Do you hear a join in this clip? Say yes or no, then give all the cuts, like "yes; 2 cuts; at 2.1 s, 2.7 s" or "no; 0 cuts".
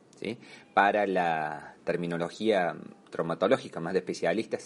no; 0 cuts